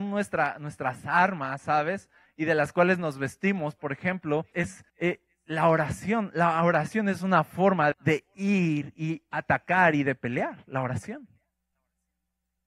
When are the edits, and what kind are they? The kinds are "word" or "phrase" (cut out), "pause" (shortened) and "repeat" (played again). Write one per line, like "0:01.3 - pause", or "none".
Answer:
0:04.5 - word
0:04.9 - pause
0:07.9 - word